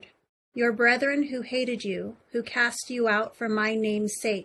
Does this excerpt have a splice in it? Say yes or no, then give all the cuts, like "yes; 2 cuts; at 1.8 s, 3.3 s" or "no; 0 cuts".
no; 0 cuts